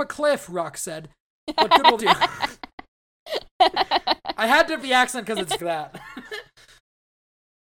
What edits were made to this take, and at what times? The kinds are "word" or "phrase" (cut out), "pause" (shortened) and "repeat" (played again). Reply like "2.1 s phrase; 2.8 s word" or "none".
2.0 s word; 4.8 s word; 5.6 s phrase; 6.8 s pause